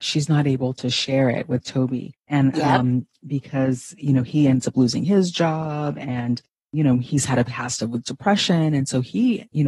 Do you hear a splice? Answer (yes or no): no